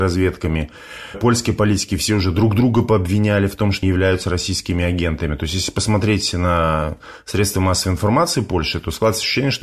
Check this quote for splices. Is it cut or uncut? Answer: cut